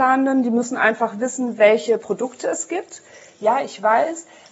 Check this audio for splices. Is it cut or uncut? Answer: uncut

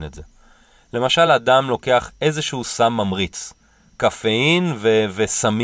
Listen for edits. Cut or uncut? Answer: uncut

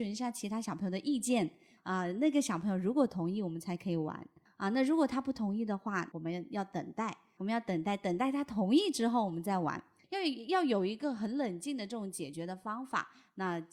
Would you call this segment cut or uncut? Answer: uncut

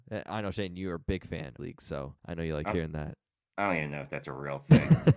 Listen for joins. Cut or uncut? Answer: cut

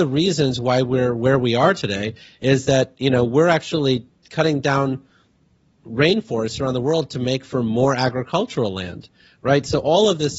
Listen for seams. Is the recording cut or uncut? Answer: uncut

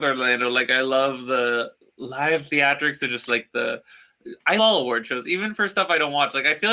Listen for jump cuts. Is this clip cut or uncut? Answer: cut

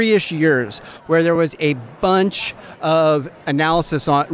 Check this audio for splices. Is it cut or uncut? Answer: uncut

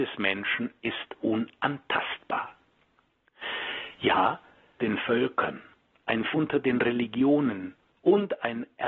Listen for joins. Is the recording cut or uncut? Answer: cut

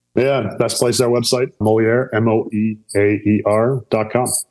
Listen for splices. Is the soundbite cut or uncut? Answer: cut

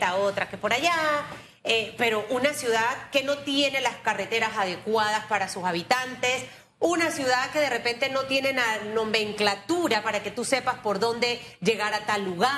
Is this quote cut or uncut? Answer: uncut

